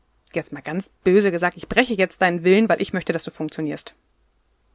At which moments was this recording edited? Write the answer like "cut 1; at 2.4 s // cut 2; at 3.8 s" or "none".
cut 1; at 0.9 s